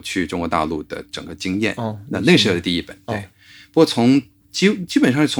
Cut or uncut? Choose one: uncut